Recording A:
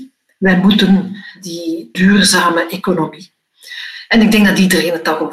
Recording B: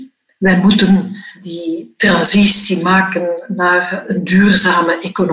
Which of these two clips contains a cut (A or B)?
A